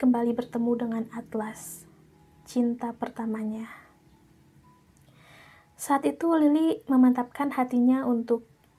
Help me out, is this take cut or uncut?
uncut